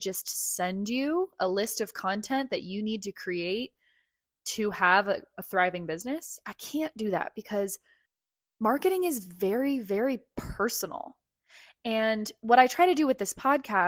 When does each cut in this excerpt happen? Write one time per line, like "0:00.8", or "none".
none